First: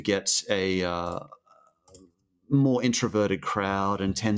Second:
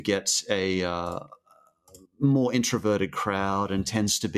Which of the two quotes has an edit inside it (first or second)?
second